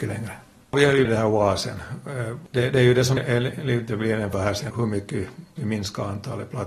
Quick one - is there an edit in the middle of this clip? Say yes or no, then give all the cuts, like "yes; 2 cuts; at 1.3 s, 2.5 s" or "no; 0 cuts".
yes; 5 cuts; at 1.0 s, 3.2 s, 4.3 s, 4.7 s, 5.6 s